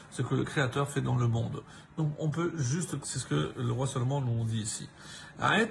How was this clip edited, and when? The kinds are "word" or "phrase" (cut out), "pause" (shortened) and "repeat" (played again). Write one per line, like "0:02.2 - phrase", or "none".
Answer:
0:03.0 - word